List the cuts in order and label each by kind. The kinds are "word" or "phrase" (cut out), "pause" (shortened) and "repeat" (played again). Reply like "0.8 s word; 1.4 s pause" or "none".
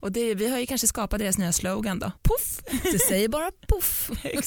2.2 s pause